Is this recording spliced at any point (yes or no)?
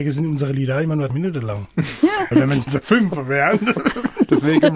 yes